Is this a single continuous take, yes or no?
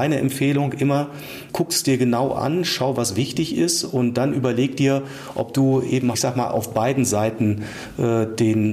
no